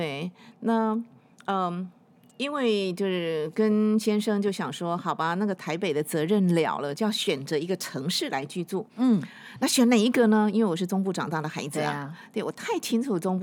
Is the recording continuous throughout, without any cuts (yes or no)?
yes